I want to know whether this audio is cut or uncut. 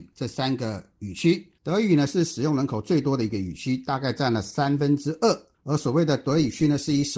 cut